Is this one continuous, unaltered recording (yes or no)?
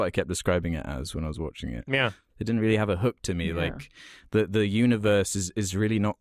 yes